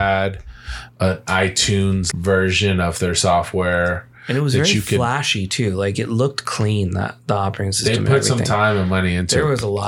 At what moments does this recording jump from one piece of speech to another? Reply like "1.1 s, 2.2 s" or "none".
2.1 s